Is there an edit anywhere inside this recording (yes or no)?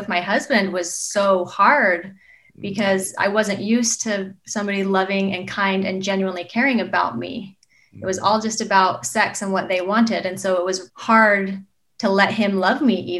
yes